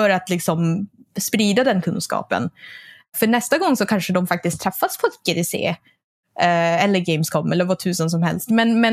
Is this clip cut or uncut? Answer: uncut